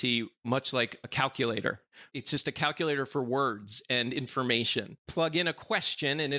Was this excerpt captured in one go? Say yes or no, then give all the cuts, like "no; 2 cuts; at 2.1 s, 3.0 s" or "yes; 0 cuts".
yes; 0 cuts